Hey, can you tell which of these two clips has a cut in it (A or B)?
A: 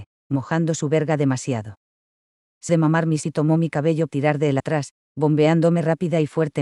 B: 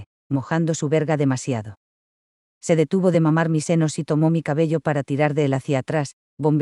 A